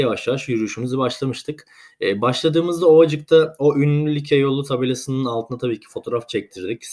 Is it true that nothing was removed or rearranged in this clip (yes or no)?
yes